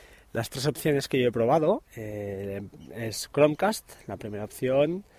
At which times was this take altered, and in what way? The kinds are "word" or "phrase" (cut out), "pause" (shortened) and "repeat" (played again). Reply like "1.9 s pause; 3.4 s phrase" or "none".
1.9 s pause